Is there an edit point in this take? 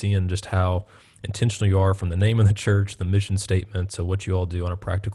no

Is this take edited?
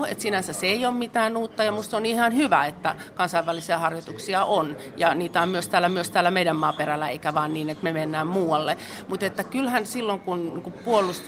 yes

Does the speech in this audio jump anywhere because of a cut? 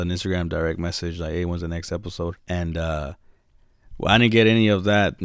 yes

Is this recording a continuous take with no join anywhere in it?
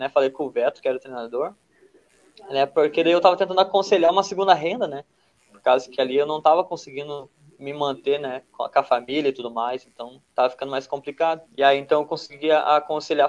no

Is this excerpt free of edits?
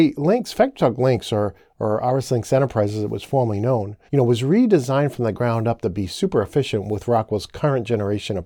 no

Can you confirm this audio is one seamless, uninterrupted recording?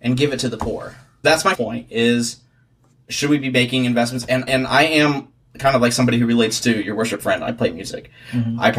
no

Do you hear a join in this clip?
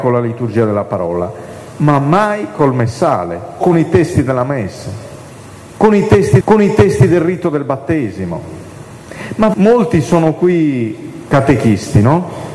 yes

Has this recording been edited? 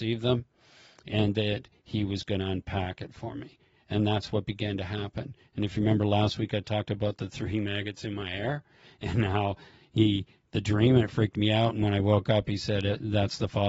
no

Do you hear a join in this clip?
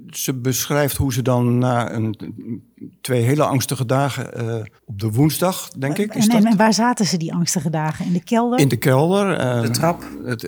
yes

